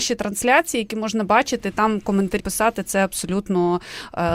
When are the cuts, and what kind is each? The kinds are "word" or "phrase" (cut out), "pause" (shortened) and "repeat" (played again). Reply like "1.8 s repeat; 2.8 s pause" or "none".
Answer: 2.4 s word